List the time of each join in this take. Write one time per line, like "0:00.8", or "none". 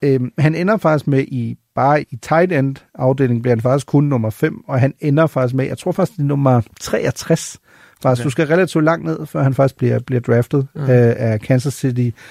0:02.0
0:06.7